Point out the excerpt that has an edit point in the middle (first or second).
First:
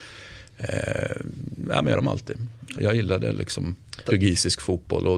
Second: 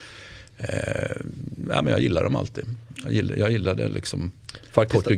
first